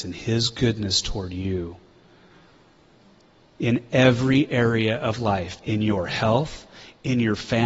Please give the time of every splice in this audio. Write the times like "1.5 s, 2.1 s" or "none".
none